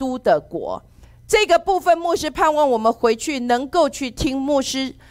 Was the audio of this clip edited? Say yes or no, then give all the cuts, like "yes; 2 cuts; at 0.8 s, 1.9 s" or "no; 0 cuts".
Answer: yes; 1 cut; at 1.0 s